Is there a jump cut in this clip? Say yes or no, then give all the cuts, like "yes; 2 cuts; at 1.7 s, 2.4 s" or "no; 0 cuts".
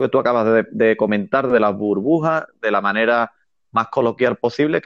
no; 0 cuts